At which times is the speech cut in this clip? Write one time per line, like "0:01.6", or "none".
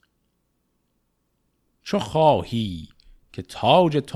none